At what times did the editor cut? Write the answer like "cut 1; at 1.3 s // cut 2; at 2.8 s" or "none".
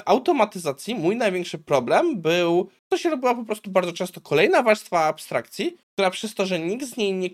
cut 1; at 2.8 s // cut 2; at 5.8 s